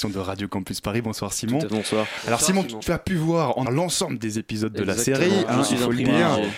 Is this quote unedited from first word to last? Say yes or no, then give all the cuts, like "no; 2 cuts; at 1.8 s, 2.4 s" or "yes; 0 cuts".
no; 3 cuts; at 1.7 s, 2.8 s, 3.7 s